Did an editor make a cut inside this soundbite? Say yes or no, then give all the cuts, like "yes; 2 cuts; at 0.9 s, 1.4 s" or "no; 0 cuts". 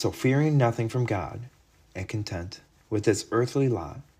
no; 0 cuts